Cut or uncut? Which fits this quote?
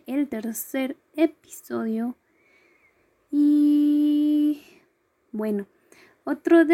uncut